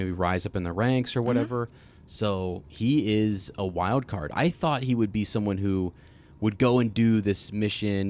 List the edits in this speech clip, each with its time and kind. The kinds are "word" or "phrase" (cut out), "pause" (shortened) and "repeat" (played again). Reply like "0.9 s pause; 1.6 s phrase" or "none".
none